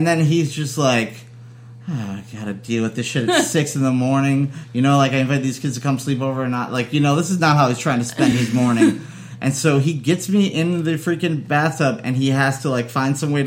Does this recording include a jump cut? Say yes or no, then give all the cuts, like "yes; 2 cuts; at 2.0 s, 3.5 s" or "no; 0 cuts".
no; 0 cuts